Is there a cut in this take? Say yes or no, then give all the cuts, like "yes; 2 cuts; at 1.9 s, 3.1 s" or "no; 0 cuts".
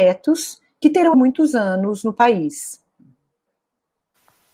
yes; 1 cut; at 1.1 s